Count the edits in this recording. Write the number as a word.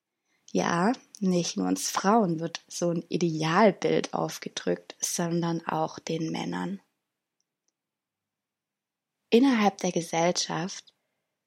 zero